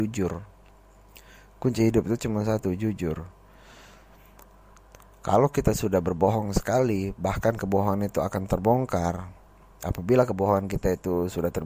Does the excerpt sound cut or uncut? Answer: uncut